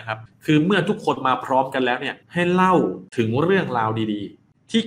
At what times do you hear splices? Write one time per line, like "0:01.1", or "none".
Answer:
0:02.2